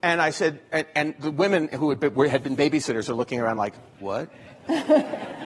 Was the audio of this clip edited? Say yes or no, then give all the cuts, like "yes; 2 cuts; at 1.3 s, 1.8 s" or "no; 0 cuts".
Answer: no; 0 cuts